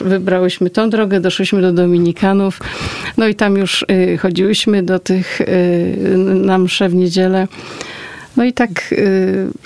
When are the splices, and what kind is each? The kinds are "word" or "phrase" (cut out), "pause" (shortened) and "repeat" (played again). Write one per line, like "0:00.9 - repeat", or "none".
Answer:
none